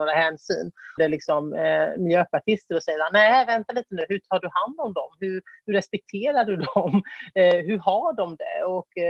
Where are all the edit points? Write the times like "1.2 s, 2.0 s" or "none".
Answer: 1.0 s